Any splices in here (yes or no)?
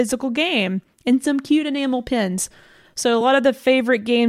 no